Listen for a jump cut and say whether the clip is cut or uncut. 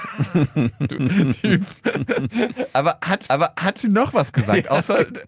cut